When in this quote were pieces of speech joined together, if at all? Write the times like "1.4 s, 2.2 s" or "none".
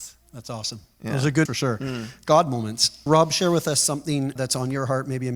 1.5 s, 3.1 s, 4.4 s